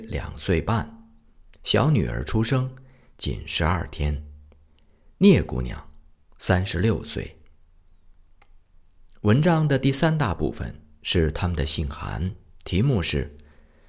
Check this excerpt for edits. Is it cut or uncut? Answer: uncut